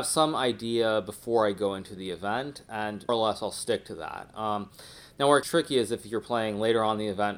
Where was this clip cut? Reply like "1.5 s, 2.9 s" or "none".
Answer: 3.1 s, 5.4 s